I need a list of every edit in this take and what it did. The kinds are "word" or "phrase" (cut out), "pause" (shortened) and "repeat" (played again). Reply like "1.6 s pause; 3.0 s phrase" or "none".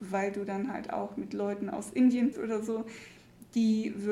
2.3 s word

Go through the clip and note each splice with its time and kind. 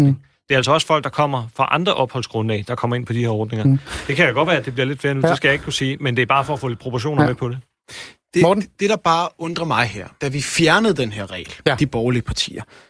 10.2 s phrase

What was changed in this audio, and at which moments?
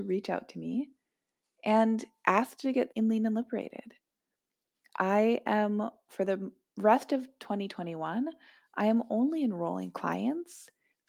2.9 s word

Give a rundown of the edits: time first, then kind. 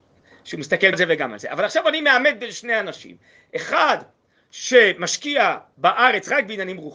0.9 s word

